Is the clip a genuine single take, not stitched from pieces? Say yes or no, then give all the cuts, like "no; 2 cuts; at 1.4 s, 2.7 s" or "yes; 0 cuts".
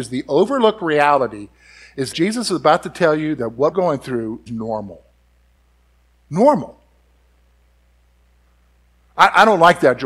no; 4 cuts; at 2.1 s, 3.7 s, 4.5 s, 5.6 s